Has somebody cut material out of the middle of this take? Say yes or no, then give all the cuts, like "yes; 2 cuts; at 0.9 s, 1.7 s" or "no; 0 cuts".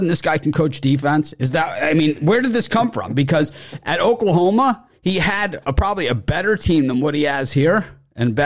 no; 0 cuts